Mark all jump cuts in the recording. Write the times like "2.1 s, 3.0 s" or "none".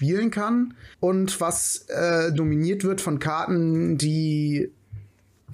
0.9 s